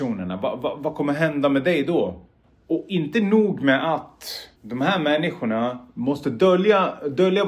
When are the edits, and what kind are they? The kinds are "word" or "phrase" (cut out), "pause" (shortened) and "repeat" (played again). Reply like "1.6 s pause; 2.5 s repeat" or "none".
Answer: 4.6 s pause